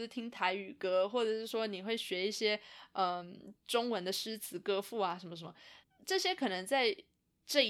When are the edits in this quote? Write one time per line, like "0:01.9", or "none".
0:03.6
0:05.8